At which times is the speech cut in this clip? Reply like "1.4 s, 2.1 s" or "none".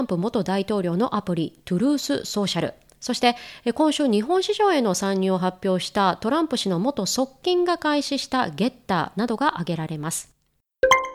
none